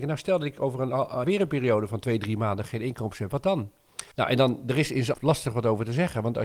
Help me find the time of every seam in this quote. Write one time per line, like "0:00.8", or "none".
0:01.2
0:04.1
0:05.1